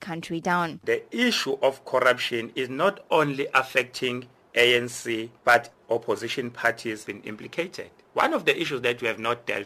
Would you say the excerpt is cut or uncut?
cut